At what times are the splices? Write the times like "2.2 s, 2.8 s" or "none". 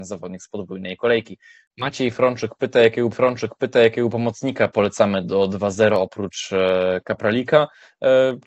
3.1 s